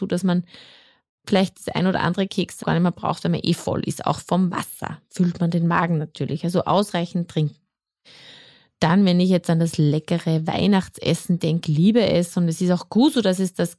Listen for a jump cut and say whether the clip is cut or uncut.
cut